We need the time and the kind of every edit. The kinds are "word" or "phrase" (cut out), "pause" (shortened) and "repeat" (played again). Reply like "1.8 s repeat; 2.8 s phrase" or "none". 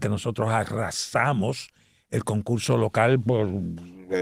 none